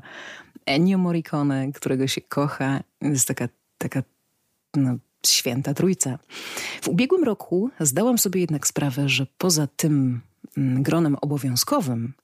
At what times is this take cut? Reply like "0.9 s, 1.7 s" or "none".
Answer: none